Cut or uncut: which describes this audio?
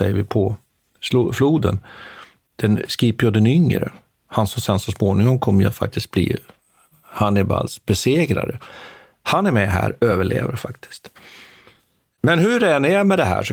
uncut